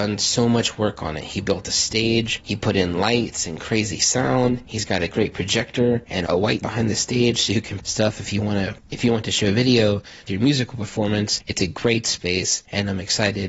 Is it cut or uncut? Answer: cut